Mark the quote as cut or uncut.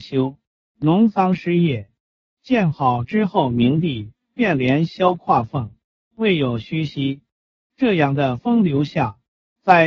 uncut